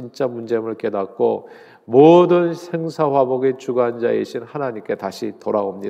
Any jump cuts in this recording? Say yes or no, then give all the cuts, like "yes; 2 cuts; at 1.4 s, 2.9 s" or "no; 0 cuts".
no; 0 cuts